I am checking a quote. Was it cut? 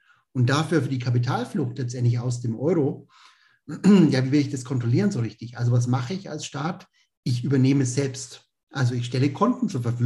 no; 0 cuts

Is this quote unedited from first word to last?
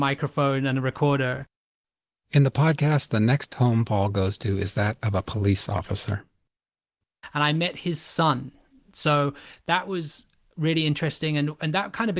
yes; 0 cuts

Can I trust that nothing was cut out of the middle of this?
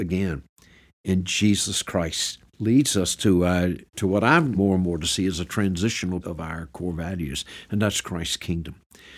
no; 4 cuts; at 2.5 s, 3.9 s, 4.5 s, 6.2 s

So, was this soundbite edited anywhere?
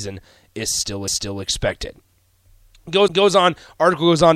yes; 2 cuts; at 1.1 s, 3.1 s

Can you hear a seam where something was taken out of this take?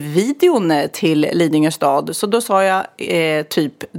no; 0 cuts

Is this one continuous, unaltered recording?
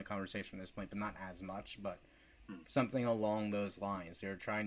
yes; 0 cuts

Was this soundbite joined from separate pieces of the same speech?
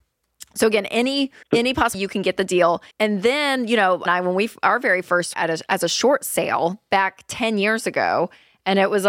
yes; 6 cuts; at 1.4 s, 1.9 s, 2.9 s, 4.1 s, 5.3 s, 5.7 s

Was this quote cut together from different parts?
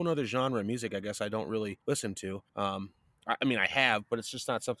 yes; 2 cuts; at 1.8 s, 2.5 s

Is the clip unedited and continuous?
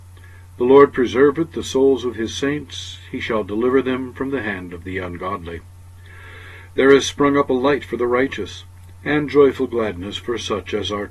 yes; 0 cuts

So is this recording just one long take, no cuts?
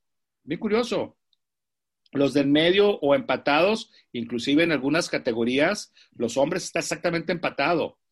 yes; 0 cuts

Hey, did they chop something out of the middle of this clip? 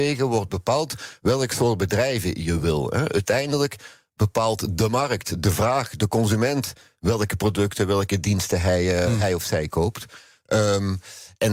no; 0 cuts

